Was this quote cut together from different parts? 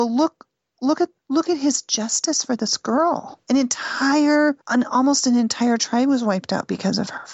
yes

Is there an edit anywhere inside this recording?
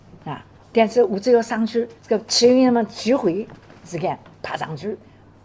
yes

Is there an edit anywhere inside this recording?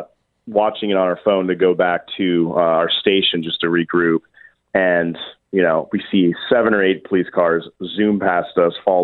no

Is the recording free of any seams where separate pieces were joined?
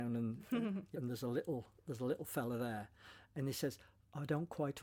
no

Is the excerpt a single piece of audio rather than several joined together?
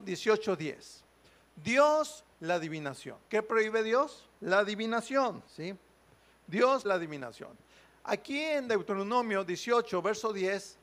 no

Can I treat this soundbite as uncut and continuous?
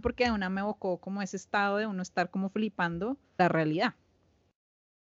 no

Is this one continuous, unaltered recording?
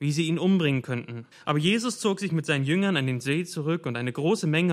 no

